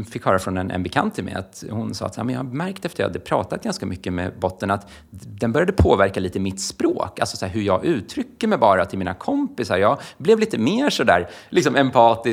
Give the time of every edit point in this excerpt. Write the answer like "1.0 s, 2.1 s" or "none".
none